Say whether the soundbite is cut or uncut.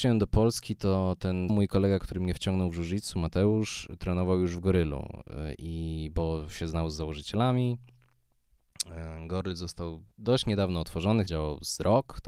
cut